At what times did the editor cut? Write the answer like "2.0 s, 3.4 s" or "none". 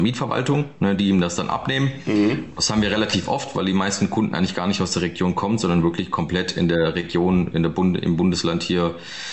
none